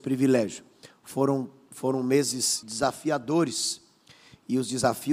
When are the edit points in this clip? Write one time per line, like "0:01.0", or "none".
0:02.6